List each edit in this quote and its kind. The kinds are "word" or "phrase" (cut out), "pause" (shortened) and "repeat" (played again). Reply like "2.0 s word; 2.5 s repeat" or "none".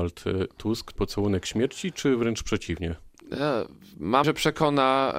1.0 s word; 4.2 s word